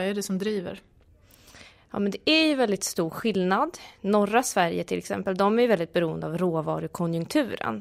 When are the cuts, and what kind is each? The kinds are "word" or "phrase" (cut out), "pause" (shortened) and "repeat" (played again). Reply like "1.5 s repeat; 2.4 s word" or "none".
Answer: none